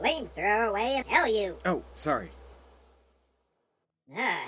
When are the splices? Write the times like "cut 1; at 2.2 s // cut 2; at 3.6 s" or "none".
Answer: cut 1; at 1.0 s // cut 2; at 1.9 s